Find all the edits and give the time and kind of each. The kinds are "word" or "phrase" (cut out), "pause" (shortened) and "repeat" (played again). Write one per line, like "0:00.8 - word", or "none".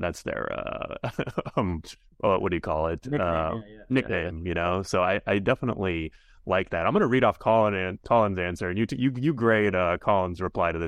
none